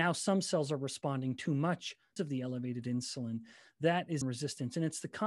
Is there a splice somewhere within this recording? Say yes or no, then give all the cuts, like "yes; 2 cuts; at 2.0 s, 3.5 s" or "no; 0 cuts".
yes; 2 cuts; at 2.2 s, 4.2 s